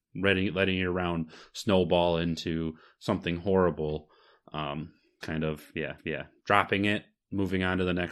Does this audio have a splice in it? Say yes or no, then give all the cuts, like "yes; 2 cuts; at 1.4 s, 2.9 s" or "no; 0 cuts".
yes; 2 cuts; at 5.2 s, 6.0 s